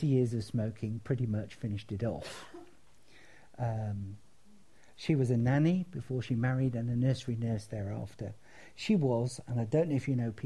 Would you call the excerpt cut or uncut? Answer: uncut